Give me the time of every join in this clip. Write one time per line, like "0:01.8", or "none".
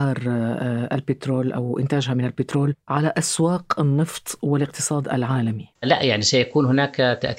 0:05.8